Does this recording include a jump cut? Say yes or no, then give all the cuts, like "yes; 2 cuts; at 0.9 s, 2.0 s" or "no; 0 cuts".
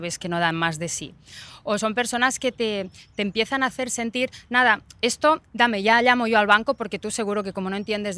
no; 0 cuts